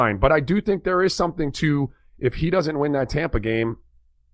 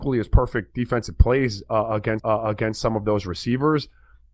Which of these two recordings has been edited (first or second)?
second